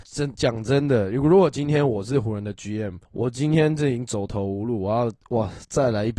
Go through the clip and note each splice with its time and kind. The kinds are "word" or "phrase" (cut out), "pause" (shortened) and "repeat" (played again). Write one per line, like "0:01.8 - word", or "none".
0:03.1 - pause

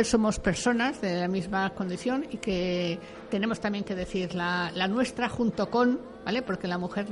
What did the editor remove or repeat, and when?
none

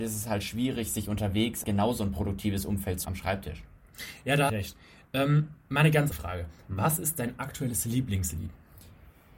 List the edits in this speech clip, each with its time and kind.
0:01.6 - word
0:03.0 - phrase
0:04.5 - phrase
0:06.1 - word

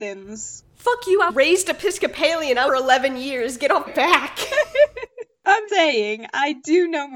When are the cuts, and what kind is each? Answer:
0:01.3 - word
0:02.7 - phrase
0:03.9 - word
0:05.7 - word

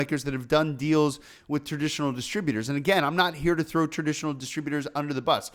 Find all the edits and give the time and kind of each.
none

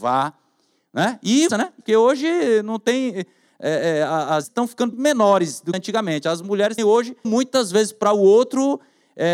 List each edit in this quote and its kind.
0:01.5 - word
0:01.8 - word
0:04.4 - word
0:04.9 - word
0:05.7 - word
0:06.8 - word
0:07.2 - word

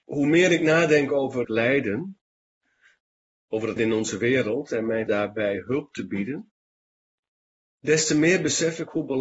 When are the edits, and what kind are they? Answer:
0:01.4 - word
0:03.8 - word
0:05.1 - word

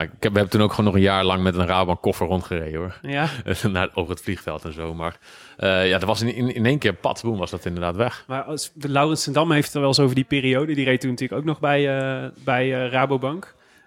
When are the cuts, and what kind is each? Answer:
none

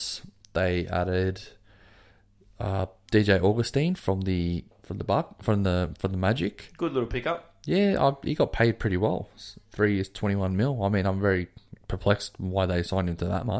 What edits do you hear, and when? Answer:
0:09.6 - pause

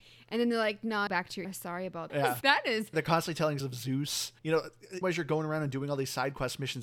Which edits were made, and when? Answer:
0:01.1 - phrase
0:01.4 - phrase
0:02.1 - word
0:02.4 - word
0:02.9 - phrase
0:03.6 - word
0:04.4 - pause
0:05.0 - word

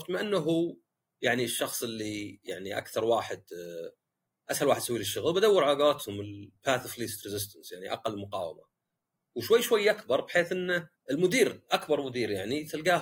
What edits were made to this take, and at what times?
0:10.9 - pause

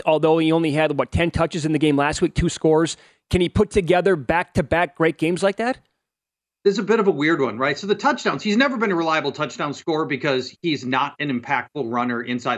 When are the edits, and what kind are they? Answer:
none

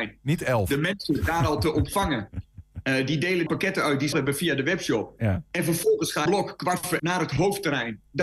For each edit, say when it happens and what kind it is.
0:03.5 - word
0:04.1 - word
0:06.3 - phrase
0:07.0 - word

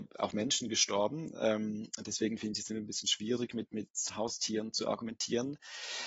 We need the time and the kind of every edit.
none

